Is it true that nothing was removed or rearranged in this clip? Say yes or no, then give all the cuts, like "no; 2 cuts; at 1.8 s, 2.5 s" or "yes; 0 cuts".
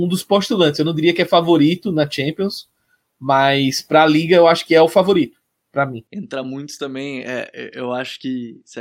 yes; 0 cuts